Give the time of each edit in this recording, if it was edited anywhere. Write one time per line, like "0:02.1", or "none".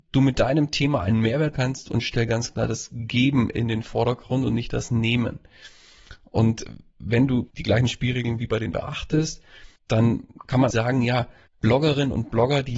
0:01.5
0:07.5
0:08.7
0:09.8
0:10.7
0:11.5